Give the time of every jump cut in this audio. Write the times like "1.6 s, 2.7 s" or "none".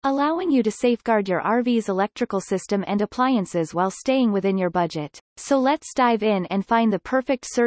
5.2 s